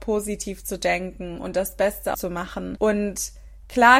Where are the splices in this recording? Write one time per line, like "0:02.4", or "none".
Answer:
0:02.1